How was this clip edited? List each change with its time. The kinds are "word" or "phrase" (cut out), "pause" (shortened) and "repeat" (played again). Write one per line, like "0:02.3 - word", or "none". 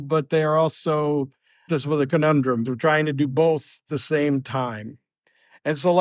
0:01.7 - word
0:02.6 - word
0:03.9 - word